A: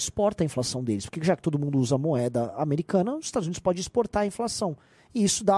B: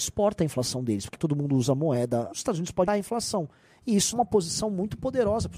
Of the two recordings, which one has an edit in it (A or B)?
B